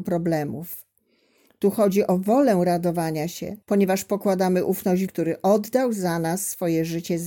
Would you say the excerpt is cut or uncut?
cut